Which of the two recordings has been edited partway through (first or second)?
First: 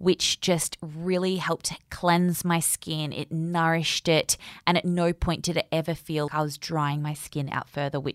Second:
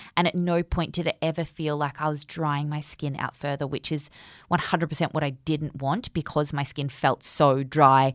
first